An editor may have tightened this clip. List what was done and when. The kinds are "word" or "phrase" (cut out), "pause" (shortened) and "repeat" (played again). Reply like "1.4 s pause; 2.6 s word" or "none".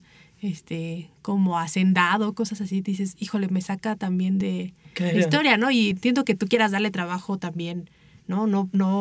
none